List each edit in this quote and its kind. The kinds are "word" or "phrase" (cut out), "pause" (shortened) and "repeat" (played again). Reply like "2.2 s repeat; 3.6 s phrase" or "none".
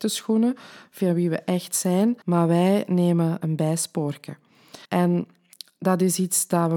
2.2 s pause; 3.4 s word; 4.9 s pause